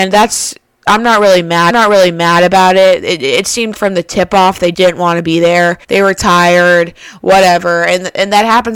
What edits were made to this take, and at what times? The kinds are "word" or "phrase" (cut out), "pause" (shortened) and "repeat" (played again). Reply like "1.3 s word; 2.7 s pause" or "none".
1.7 s repeat; 3.7 s word; 4.7 s word; 5.8 s pause